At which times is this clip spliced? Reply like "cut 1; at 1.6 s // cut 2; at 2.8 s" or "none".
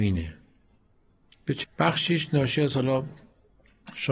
cut 1; at 1.6 s